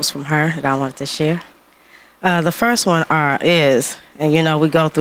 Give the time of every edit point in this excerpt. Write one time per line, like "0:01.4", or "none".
none